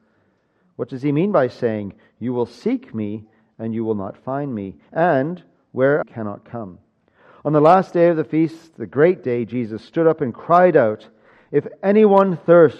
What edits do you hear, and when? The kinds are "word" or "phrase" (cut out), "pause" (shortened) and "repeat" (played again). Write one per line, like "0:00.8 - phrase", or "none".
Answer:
0:06.0 - phrase